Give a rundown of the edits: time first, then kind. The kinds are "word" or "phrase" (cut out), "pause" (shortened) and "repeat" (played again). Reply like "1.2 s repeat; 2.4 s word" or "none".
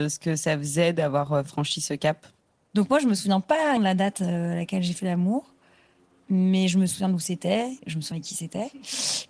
2.4 s pause; 3.8 s word; 7.8 s pause; 8.1 s word